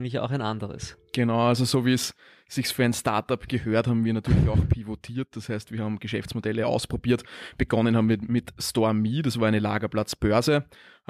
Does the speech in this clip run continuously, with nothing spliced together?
yes; 0 cuts

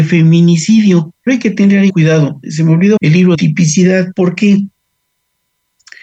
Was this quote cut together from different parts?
yes; 4 cuts; at 1.3 s, 1.9 s, 3.0 s, 3.3 s

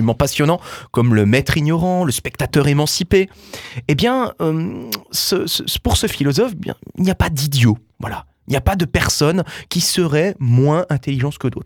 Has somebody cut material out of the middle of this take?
no; 0 cuts

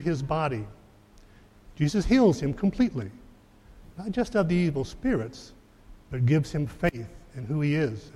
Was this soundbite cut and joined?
no; 0 cuts

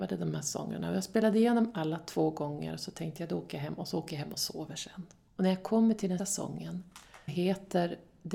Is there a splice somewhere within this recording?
yes; 3 cuts; at 5.3 s, 6.2 s, 7.3 s

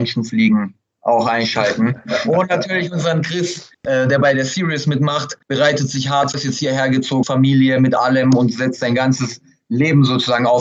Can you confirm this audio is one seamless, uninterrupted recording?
no; 4 cuts; at 3.7 s, 5.4 s, 6.3 s, 7.2 s

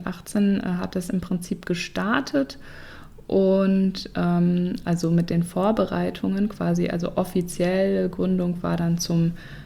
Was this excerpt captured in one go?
yes; 0 cuts

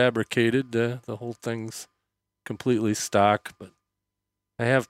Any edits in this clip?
no; 0 cuts

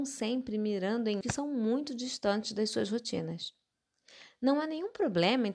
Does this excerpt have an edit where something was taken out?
yes; 1 cut; at 1.2 s

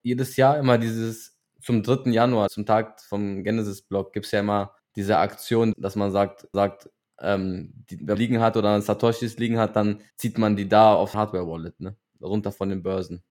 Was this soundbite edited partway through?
yes; 7 cuts; at 2.5 s, 4.8 s, 5.7 s, 6.5 s, 8.1 s, 10.1 s, 11.1 s

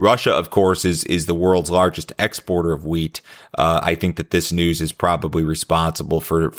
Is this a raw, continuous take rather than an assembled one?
yes; 0 cuts

